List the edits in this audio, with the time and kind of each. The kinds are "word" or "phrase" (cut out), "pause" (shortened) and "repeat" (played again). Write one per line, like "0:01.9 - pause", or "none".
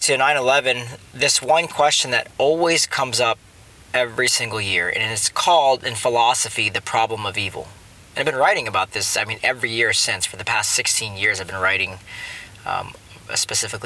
none